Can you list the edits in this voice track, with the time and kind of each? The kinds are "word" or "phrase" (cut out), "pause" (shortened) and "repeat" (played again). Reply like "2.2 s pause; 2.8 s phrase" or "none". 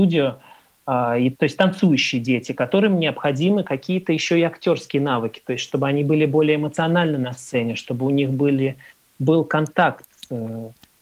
1.3 s phrase